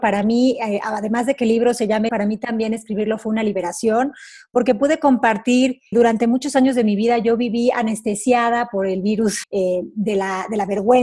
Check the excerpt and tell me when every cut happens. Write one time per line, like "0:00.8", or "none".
0:02.1
0:05.9
0:09.4